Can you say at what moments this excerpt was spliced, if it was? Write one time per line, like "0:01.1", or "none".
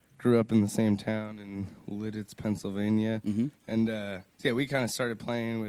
0:04.3